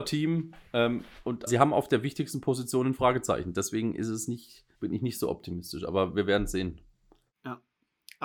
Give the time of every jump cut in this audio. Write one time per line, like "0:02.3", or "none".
0:01.5
0:04.7